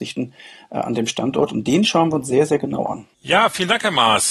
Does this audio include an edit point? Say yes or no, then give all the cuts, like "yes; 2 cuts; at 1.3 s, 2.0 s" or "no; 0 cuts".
no; 0 cuts